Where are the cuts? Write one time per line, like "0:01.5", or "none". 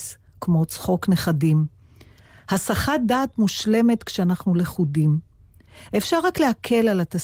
none